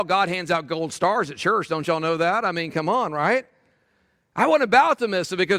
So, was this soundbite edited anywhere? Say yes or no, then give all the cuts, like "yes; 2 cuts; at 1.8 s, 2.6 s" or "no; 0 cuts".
no; 0 cuts